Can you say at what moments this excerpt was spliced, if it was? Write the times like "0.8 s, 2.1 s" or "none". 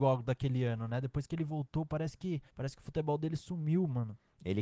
2.5 s